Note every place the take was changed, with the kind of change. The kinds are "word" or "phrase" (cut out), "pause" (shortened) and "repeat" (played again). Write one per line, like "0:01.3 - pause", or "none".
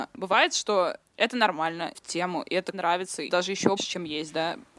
0:01.1 - pause
0:01.9 - word
0:02.7 - phrase
0:03.3 - word
0:03.8 - word